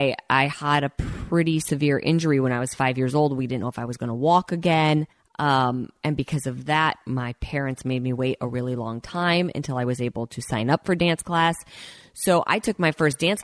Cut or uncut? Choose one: cut